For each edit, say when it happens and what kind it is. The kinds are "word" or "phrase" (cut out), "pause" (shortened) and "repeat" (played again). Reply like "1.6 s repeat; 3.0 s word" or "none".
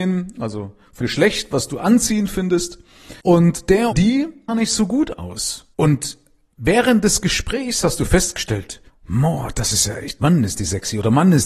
1.0 s word; 3.2 s pause; 3.9 s word; 4.5 s phrase; 5.7 s pause; 8.9 s pause; 10.2 s phrase